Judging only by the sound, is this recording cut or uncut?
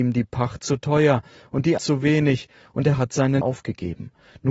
cut